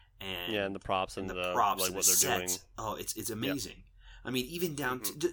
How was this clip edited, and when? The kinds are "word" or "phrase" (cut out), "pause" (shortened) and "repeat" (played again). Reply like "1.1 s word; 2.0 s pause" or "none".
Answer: none